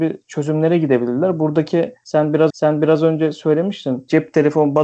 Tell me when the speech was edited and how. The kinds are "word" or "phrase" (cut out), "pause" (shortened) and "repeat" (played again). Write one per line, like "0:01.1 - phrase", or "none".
0:02.5 - repeat